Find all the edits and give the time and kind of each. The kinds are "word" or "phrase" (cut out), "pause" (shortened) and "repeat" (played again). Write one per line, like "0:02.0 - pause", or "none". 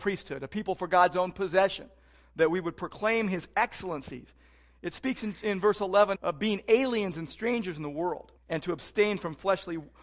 0:06.2 - word
0:08.4 - pause

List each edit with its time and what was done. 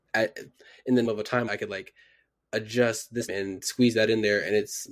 0:01.0 - word
0:01.5 - word
0:03.3 - word

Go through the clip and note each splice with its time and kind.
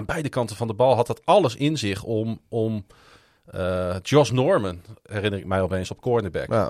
none

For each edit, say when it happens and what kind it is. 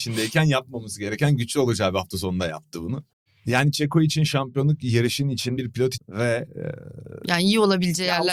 0:03.1 - pause
0:05.6 - word
0:06.0 - phrase

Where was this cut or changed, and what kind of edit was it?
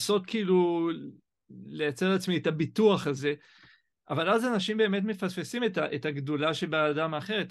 none

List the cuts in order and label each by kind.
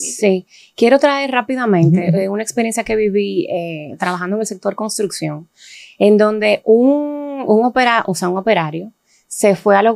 none

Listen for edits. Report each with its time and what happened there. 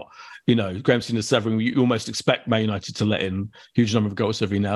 none

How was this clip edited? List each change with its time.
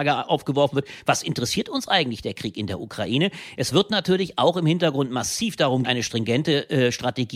0:05.8 - word

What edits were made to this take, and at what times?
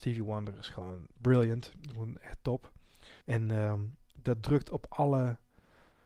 0:01.1 - pause
0:03.2 - pause

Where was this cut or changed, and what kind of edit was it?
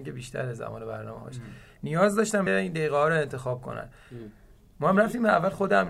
0:02.5 - word

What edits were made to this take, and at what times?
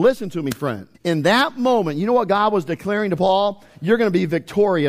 0:00.9 - pause

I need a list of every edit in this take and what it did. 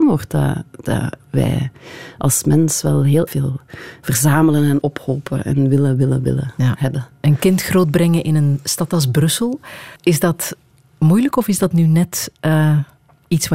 0:03.3 - word
0:04.8 - word
0:10.0 - pause

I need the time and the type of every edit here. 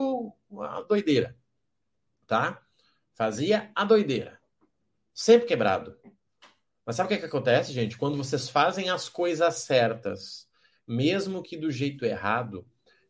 none

